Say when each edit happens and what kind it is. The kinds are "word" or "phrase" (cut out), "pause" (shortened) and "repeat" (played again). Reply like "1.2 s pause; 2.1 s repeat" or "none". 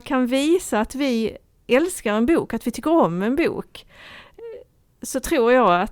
none